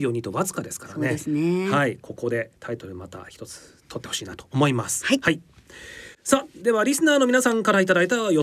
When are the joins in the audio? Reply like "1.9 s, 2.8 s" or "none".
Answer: 2.6 s